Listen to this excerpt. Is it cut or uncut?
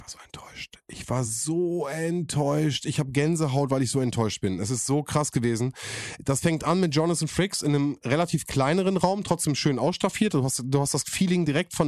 uncut